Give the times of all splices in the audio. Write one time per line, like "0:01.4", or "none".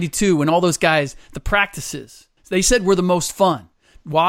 0:02.4

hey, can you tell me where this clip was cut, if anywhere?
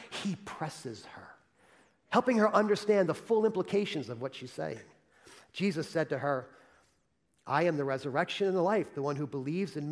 none

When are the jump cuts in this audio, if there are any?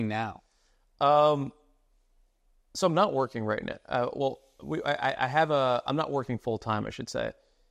none

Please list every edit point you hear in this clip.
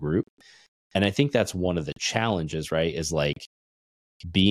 none

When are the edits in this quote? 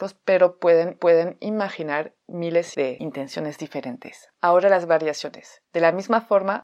0:01.0
0:02.7
0:04.3
0:05.6

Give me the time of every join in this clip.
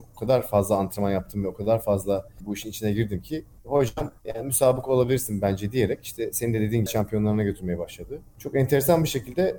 0:06.9

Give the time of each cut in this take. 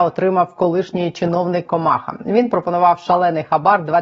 0:01.6

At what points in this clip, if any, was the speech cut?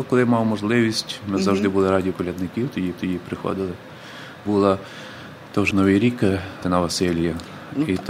0:02.1
0:03.0
0:04.5
0:05.7
0:06.6

